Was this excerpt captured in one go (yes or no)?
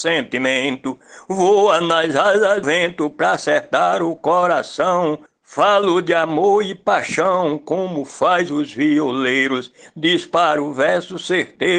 no